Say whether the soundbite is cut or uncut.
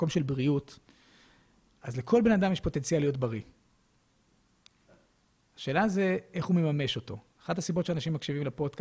uncut